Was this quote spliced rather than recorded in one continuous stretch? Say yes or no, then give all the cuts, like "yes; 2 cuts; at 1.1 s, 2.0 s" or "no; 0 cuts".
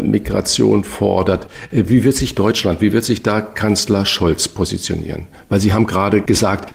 no; 0 cuts